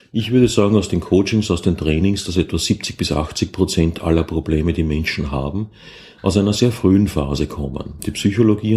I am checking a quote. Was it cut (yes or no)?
no